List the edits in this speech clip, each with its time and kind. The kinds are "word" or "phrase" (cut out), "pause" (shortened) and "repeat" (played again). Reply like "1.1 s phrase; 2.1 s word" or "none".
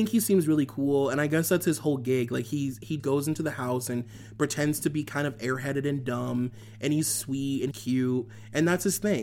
3.0 s word; 7.7 s word